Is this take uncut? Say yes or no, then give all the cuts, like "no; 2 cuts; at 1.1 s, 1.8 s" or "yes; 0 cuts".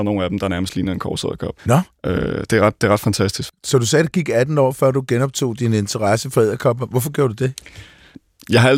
no; 2 cuts; at 1.6 s, 3.6 s